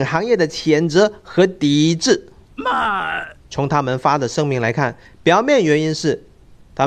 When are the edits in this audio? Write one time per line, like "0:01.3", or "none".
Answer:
0:03.4